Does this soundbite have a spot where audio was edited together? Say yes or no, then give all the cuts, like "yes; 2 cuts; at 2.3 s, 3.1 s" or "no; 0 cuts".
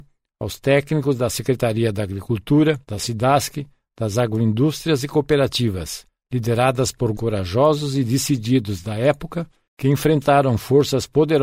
yes; 2 cuts; at 2.8 s, 7.1 s